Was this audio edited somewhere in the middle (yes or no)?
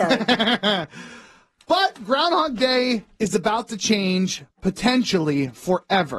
no